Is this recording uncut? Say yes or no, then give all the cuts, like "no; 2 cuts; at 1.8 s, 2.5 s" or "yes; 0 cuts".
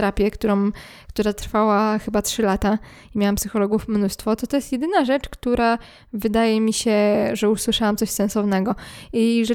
yes; 0 cuts